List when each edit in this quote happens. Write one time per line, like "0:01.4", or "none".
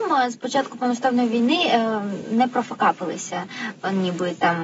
none